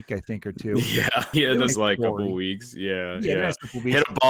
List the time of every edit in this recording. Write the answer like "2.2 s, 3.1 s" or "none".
1.3 s, 1.7 s